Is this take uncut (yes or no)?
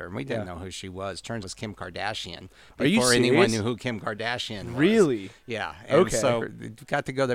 no